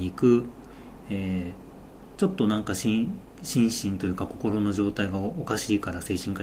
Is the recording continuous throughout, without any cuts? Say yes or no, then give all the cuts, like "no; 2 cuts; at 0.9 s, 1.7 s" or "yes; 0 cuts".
yes; 0 cuts